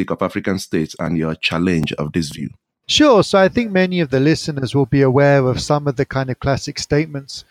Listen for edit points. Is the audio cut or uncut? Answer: uncut